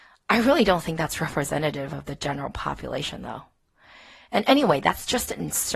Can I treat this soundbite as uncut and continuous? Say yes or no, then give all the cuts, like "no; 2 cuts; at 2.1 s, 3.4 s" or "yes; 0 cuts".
yes; 0 cuts